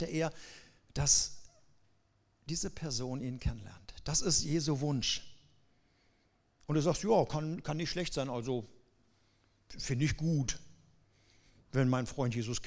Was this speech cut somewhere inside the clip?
no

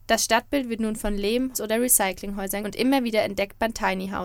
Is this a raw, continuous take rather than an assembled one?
no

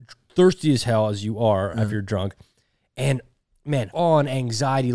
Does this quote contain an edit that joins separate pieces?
yes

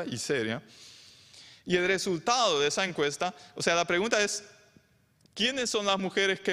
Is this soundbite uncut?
yes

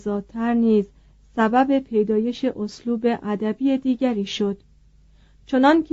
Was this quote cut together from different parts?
no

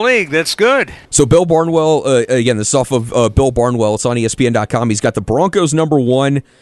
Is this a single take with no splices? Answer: no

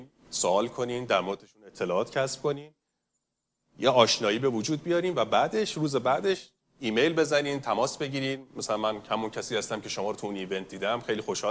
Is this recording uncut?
yes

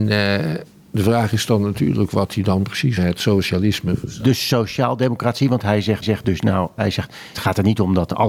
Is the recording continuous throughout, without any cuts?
no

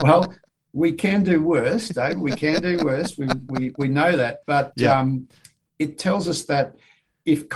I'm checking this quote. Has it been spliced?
no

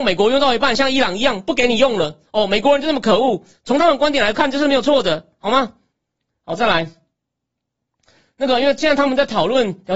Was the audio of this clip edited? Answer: no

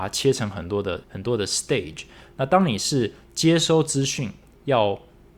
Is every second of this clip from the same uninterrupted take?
no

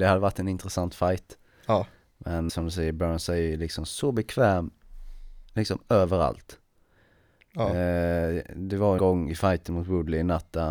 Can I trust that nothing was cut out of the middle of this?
no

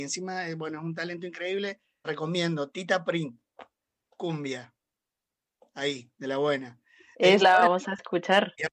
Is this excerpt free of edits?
no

